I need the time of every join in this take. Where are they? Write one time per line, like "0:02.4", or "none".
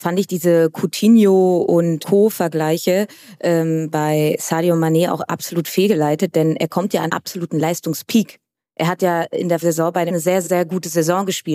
0:02.0
0:07.1
0:09.6
0:10.1
0:10.4